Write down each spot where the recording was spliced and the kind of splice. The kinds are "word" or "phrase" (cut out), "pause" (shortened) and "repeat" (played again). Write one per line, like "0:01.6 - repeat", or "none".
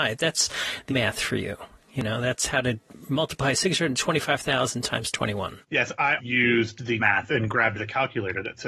0:00.9 - word
0:05.6 - pause
0:06.2 - word
0:07.0 - word